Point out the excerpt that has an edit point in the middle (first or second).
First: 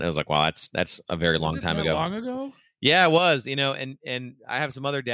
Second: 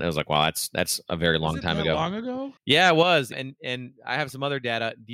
second